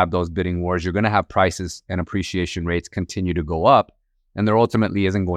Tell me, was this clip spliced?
no; 0 cuts

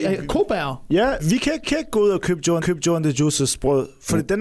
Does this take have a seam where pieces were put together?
yes; 3 cuts; at 1.2 s, 1.6 s, 2.6 s

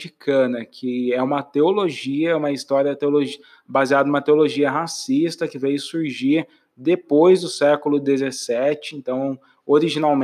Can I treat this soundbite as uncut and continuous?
yes; 0 cuts

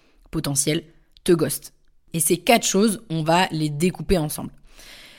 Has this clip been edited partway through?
no; 0 cuts

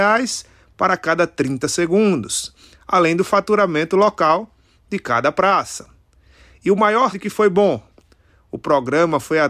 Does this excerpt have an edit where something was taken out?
yes; 1 cut; at 7.1 s

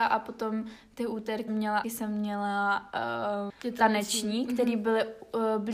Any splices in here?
yes; 3 cuts; at 1.5 s, 1.8 s, 3.5 s

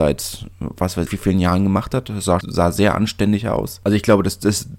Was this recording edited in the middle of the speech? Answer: yes; 2 cuts; at 1.1 s, 2.4 s

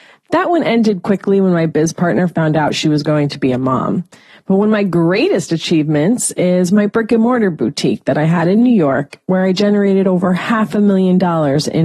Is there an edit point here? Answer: no; 0 cuts

